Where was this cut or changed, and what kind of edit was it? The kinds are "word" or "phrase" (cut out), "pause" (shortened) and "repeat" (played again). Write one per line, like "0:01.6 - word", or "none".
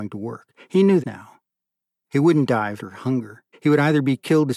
0:01.0 - word
0:02.8 - word
0:03.5 - pause